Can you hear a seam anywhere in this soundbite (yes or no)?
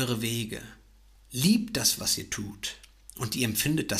no